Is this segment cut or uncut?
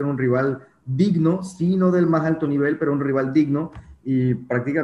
uncut